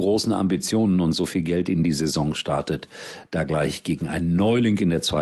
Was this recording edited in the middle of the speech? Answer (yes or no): no